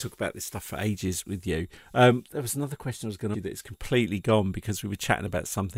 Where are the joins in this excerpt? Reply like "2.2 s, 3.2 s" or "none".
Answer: 1.2 s, 3.3 s